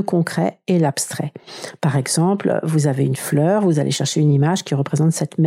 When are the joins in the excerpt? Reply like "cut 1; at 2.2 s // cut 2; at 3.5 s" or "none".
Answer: none

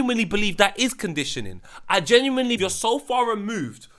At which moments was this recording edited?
cut 1; at 2.6 s

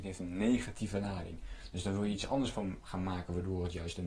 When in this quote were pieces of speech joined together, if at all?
none

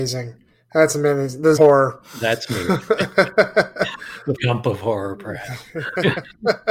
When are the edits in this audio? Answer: cut 1; at 1.6 s // cut 2; at 4.3 s

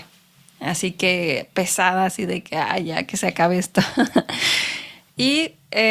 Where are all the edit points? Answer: none

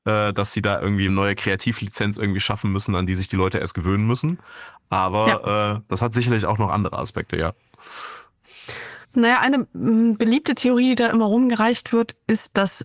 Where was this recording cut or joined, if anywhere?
cut 1; at 1.1 s // cut 2; at 9.0 s

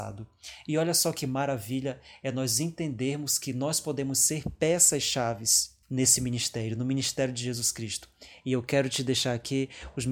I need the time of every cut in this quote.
cut 1; at 5.8 s

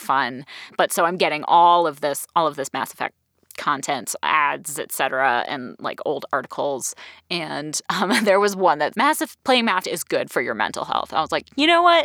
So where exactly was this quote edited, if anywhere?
cut 1; at 8.9 s // cut 2; at 9.8 s

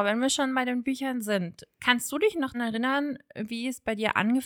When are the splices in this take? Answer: cut 1; at 2.5 s

